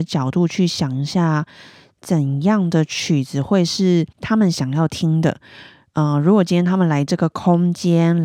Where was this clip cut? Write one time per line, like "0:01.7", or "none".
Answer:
0:04.1